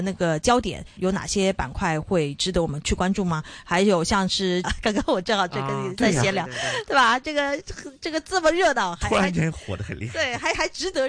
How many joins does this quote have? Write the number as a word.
two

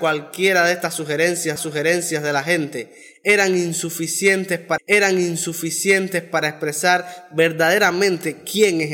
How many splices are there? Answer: two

